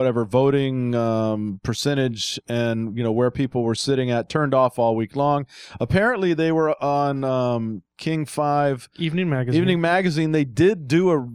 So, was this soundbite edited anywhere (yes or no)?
no